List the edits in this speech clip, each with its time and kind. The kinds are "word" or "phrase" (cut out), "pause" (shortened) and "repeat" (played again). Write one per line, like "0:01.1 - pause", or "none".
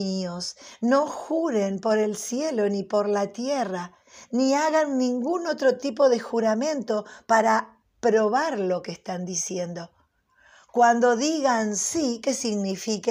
none